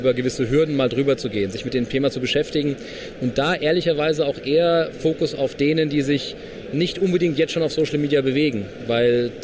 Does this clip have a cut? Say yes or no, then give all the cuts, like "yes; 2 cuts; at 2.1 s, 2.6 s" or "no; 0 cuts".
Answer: no; 0 cuts